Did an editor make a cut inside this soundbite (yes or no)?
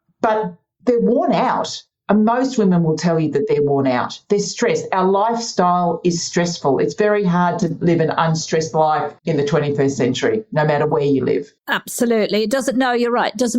yes